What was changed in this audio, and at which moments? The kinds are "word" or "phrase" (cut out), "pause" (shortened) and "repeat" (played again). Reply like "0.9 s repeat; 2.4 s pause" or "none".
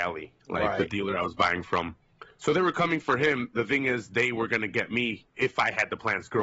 none